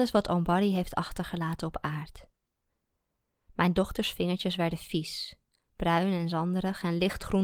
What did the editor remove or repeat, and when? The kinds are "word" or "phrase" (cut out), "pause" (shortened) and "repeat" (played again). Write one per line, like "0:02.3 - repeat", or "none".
none